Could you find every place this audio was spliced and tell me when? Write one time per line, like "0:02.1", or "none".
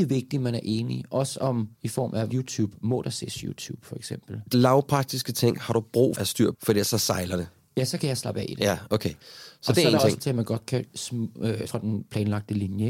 0:01.7
0:02.3
0:04.5
0:06.1
0:06.5
0:10.2
0:10.9
0:11.7

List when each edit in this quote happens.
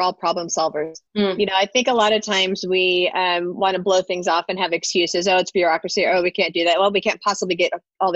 0:01.1

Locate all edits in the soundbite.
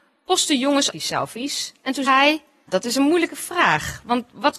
0:00.9
0:02.1
0:02.7

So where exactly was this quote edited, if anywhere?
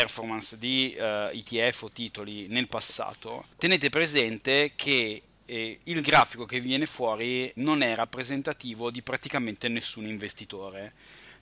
0:03.5
0:07.6

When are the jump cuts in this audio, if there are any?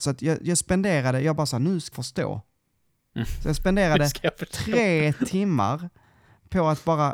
0:01.9

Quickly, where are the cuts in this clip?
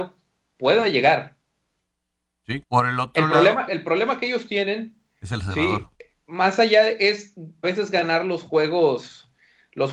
0:02.6
0:03.7
0:05.9
0:07.6

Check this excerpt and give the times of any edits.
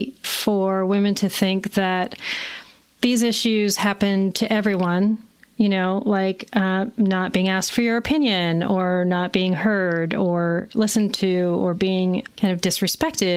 none

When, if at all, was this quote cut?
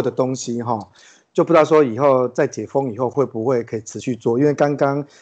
none

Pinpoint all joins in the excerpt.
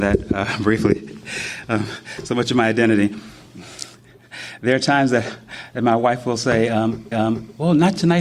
0:07.1

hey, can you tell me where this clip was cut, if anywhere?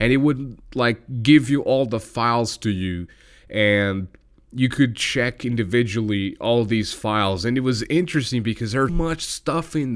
0:08.9

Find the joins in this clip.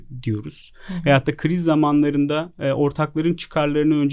none

